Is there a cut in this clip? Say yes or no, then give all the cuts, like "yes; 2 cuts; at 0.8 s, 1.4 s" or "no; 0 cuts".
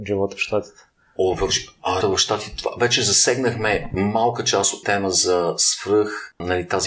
yes; 2 cuts; at 2.0 s, 4.8 s